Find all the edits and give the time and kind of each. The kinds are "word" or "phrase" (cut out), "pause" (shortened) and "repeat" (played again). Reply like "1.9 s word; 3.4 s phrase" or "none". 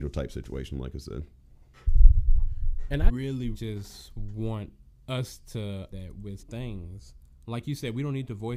3.1 s word; 3.5 s word; 5.9 s word; 6.4 s word